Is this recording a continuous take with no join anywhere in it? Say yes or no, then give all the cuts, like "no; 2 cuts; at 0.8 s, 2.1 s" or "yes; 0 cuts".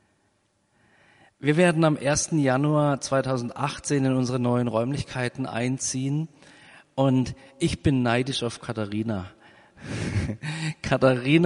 yes; 0 cuts